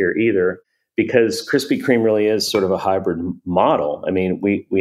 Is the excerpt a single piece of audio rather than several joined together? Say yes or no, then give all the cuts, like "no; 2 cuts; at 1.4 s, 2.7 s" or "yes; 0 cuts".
yes; 0 cuts